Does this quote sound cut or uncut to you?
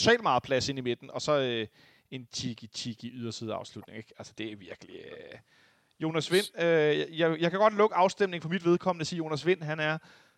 cut